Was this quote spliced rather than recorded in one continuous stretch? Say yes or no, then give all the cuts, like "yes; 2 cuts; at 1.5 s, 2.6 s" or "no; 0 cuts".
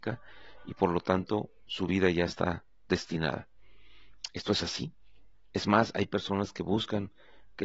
yes; 1 cut; at 5.3 s